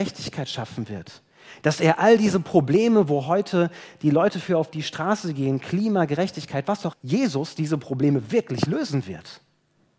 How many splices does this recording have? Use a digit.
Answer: 1